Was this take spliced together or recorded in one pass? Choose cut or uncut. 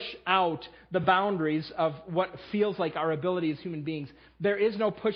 uncut